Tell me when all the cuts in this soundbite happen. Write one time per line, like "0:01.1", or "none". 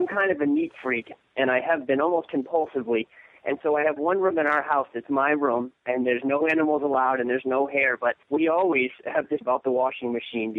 0:08.2
0:09.4